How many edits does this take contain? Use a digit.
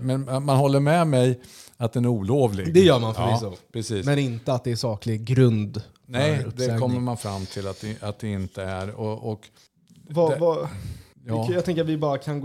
0